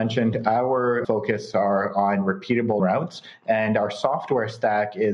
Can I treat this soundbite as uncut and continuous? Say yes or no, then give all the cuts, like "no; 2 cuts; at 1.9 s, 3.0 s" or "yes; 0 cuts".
no; 2 cuts; at 1.0 s, 2.8 s